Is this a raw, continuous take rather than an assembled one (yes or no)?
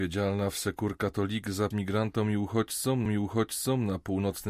no